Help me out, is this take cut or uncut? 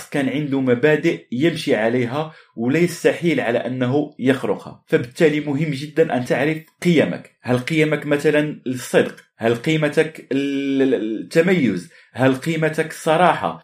uncut